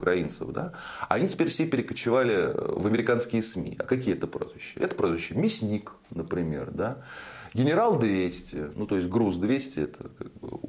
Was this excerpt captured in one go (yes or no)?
yes